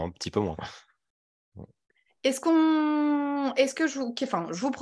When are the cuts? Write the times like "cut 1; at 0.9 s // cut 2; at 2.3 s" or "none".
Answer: cut 1; at 1.8 s